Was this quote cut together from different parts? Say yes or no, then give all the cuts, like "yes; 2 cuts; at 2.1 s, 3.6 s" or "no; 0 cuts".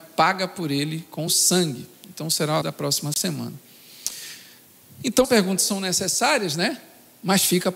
yes; 3 cuts; at 1.3 s, 2.6 s, 5.2 s